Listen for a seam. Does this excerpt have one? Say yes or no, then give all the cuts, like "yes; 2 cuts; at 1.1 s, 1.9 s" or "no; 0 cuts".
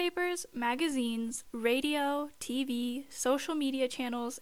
no; 0 cuts